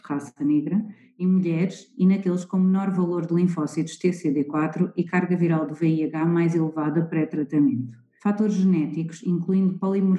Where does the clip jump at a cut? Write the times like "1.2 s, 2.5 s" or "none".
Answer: none